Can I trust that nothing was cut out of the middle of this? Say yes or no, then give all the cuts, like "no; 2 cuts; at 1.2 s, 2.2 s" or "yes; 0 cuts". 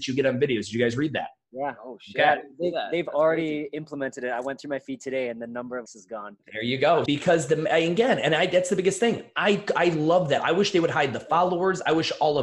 no; 2 cuts; at 5.9 s, 7.1 s